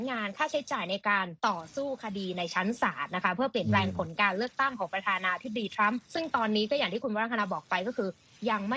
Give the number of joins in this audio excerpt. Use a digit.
2